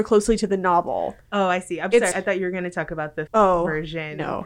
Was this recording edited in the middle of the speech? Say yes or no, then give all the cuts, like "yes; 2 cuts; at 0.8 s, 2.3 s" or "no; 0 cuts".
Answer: yes; 2 cuts; at 2.1 s, 3.3 s